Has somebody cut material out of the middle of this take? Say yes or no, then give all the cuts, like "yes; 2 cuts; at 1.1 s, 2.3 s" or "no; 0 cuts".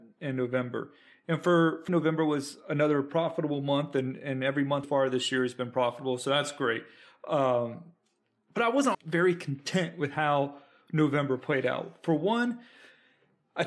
yes; 3 cuts; at 1.9 s, 4.8 s, 8.9 s